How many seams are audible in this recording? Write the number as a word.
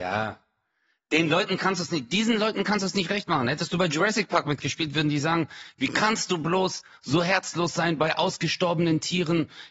zero